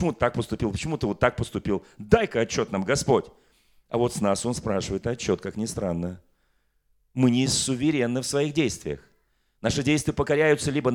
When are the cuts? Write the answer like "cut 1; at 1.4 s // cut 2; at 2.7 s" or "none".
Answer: none